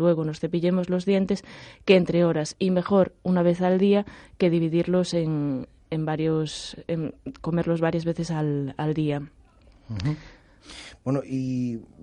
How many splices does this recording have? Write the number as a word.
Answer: zero